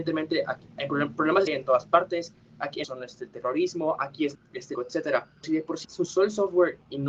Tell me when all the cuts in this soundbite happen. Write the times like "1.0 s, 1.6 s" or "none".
1.5 s, 2.8 s, 4.3 s, 4.7 s, 5.4 s, 5.8 s